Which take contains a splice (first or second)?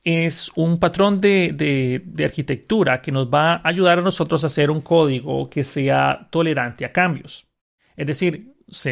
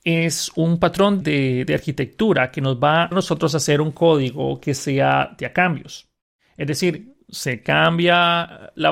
second